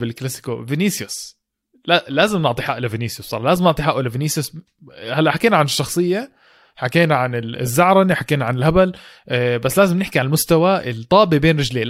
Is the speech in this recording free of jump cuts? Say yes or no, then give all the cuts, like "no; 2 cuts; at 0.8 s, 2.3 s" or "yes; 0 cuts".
yes; 0 cuts